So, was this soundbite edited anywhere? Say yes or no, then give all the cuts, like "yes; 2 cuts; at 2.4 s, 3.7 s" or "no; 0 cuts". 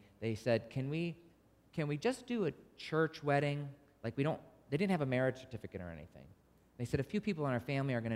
no; 0 cuts